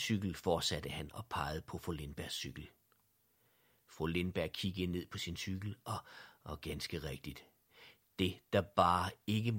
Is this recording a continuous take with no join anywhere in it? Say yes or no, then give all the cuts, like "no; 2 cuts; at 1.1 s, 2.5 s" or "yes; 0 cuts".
yes; 0 cuts